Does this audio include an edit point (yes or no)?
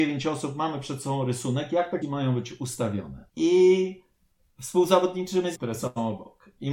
yes